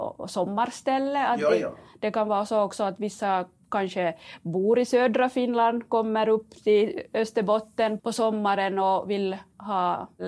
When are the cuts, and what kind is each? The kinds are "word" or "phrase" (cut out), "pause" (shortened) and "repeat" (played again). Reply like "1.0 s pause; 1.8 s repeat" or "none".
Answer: 8.0 s word